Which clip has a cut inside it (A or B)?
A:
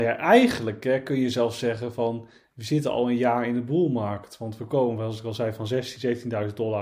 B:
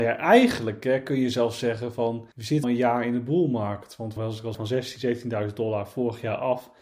B